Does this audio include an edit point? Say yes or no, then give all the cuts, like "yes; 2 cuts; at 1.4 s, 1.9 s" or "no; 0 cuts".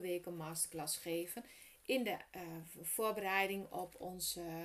no; 0 cuts